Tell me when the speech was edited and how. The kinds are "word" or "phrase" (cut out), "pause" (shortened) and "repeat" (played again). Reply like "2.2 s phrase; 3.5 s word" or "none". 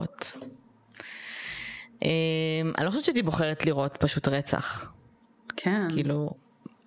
none